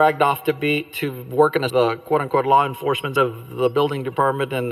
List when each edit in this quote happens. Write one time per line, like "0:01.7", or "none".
0:01.7
0:03.2